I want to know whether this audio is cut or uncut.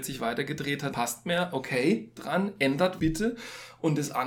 cut